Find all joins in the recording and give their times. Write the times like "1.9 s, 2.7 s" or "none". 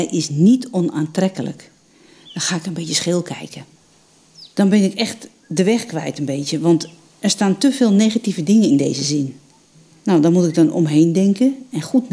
none